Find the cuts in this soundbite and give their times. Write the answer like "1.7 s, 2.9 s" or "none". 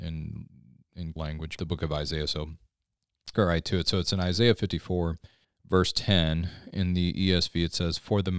1.2 s, 1.6 s, 3.3 s, 5.4 s